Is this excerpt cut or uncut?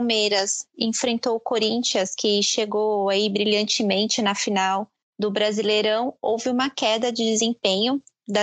cut